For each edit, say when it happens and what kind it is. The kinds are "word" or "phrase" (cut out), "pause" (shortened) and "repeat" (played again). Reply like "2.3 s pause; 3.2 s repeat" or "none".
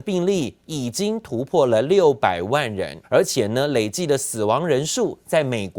3.0 s pause